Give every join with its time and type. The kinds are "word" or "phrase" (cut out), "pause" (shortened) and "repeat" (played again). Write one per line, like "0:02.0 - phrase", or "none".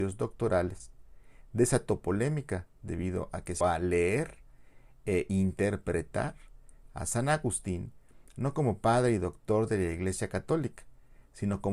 0:03.6 - word